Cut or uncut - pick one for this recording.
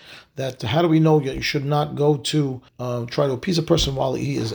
cut